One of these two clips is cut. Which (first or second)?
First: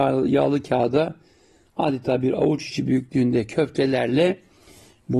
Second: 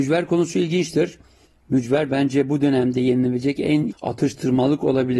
second